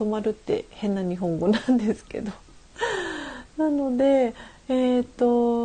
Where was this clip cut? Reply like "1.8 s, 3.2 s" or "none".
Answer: 2.6 s